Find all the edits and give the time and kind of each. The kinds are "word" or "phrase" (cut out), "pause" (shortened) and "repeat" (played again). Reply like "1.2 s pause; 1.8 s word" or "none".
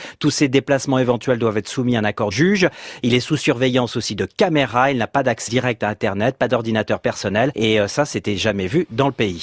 2.3 s word; 5.5 s word